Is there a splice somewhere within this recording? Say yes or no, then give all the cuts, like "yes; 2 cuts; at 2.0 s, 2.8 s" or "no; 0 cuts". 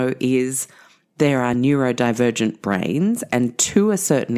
no; 0 cuts